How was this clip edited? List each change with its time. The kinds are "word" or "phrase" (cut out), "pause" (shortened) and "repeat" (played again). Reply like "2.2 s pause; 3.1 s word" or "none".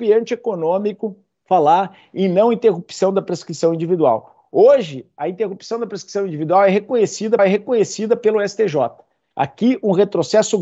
7.4 s repeat